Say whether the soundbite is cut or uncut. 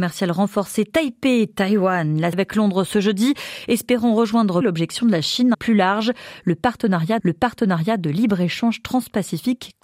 cut